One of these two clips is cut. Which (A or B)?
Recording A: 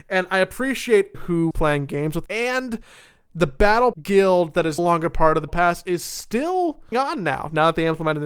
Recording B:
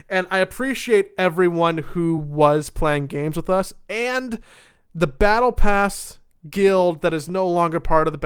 A